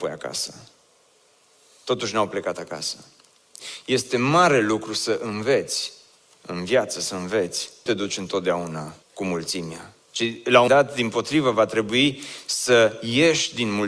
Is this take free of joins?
no; 4 cuts; at 7.9 s, 9.0 s, 10.0 s, 10.7 s

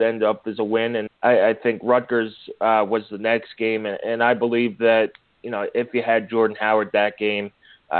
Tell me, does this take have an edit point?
yes; 1 cut; at 1.1 s

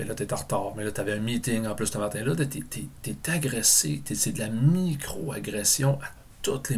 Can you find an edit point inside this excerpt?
no; 0 cuts

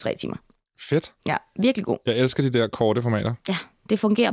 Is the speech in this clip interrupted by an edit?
no; 0 cuts

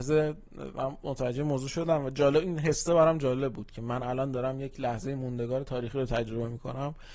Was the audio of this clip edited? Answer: no; 0 cuts

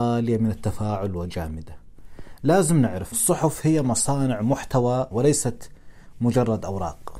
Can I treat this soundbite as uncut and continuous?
no; 2 cuts; at 3.1 s, 5.1 s

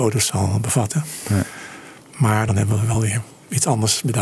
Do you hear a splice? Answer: no; 0 cuts

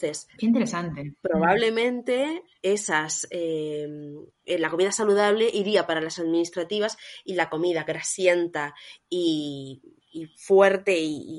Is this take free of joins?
yes; 0 cuts

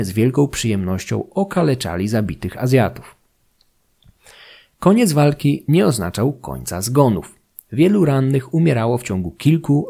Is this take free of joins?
yes; 0 cuts

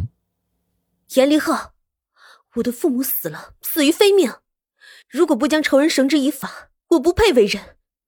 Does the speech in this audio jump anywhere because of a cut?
yes; 1 cut; at 6.8 s

